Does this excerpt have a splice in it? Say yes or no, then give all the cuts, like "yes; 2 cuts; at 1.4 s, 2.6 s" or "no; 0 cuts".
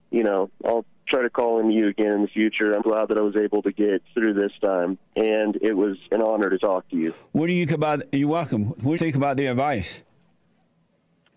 yes; 5 cuts; at 2.8 s, 4.1 s, 5.0 s, 7.7 s, 9.0 s